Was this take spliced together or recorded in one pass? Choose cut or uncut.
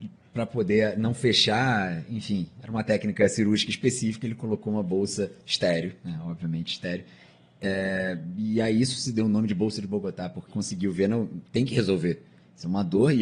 cut